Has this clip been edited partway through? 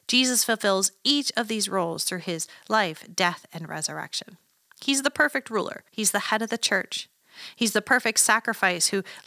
yes; 1 cut; at 5.9 s

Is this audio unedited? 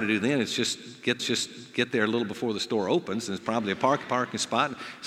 no; 2 cuts; at 1.2 s, 4.0 s

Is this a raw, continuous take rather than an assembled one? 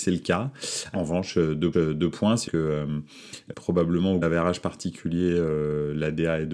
no; 5 cuts; at 0.9 s, 1.7 s, 2.5 s, 3.5 s, 4.2 s

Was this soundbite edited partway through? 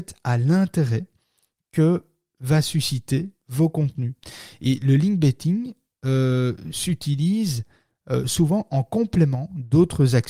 no; 0 cuts

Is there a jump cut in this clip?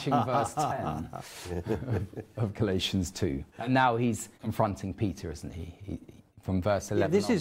yes; 3 cuts; at 3.5 s, 4.3 s, 6.3 s

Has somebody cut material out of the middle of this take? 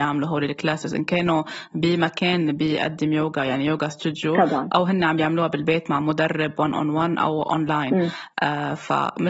no; 0 cuts

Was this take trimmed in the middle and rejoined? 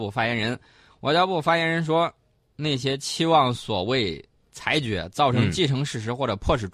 no; 0 cuts

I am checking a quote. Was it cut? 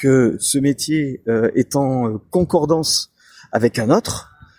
no; 0 cuts

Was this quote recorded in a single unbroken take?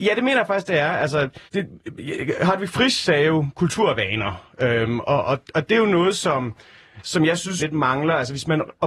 no; 2 cuts; at 1.4 s, 7.6 s

